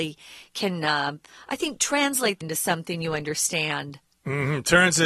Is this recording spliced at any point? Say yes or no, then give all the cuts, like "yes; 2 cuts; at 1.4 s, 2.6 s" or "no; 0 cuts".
yes; 1 cut; at 2.4 s